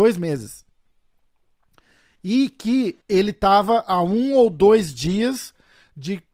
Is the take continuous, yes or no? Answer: no